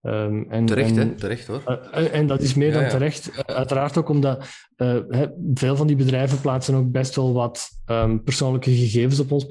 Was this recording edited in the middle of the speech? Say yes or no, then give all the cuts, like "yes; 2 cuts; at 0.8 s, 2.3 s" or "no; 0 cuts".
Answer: no; 0 cuts